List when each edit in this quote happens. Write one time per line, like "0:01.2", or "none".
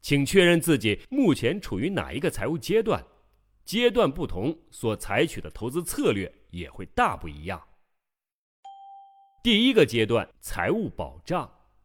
0:01.0
0:10.3